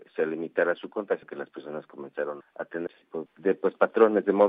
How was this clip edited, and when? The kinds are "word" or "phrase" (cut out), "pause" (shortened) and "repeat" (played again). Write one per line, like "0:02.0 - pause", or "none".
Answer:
0:01.2 - word
0:02.4 - word
0:02.9 - word
0:03.3 - word